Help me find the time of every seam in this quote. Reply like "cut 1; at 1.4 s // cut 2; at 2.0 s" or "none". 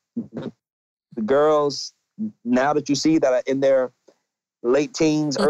none